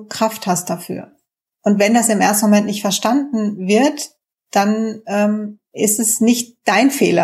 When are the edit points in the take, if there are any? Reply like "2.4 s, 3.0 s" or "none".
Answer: 1.5 s